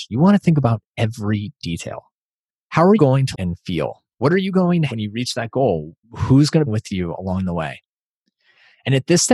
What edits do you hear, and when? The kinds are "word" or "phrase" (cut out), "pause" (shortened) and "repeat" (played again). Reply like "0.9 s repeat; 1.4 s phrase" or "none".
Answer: 2.5 s pause; 3.0 s word; 3.3 s word; 4.1 s pause; 4.9 s word; 6.0 s pause; 6.7 s phrase

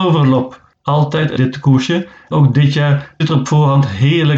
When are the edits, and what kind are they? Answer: 1.4 s word; 2.3 s word; 3.2 s word

